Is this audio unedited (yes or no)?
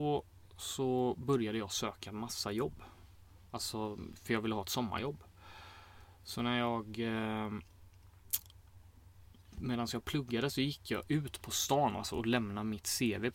yes